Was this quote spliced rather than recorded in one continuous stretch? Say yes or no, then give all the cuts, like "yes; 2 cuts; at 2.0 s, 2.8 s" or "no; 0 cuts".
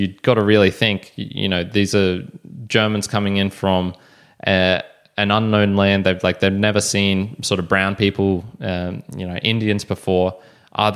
no; 0 cuts